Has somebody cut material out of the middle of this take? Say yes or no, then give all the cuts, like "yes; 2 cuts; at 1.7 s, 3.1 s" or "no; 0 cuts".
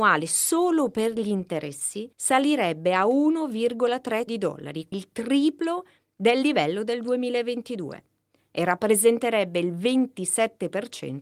yes; 3 cuts; at 2.1 s, 4.3 s, 4.9 s